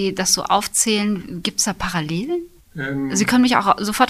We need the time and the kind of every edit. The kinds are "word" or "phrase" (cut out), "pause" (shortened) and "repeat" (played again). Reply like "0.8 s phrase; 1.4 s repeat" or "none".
2.6 s pause